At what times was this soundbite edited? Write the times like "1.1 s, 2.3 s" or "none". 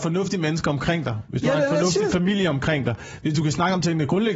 none